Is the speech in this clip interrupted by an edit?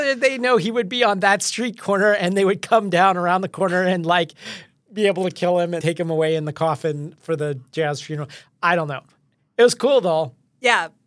yes; 1 cut; at 5.8 s

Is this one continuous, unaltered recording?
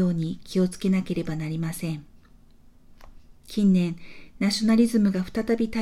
no; 1 cut; at 3.4 s

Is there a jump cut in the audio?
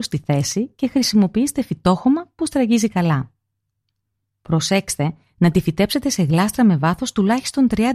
no; 0 cuts

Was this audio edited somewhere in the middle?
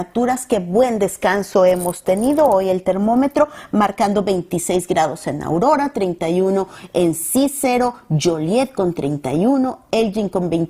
no; 0 cuts

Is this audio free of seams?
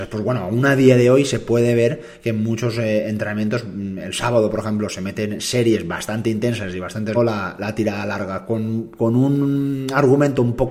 no; 1 cut; at 7.1 s

